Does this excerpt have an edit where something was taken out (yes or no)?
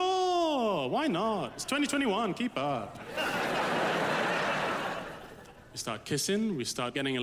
no